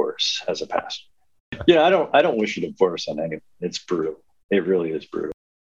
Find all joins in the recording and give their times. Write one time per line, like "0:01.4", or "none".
none